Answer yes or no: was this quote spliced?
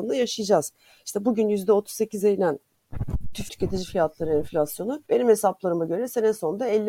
yes